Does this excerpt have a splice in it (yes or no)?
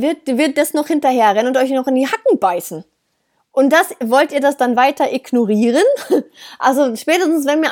no